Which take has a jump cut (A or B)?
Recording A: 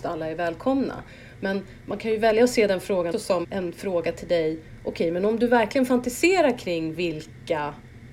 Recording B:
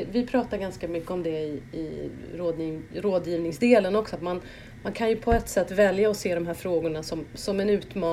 A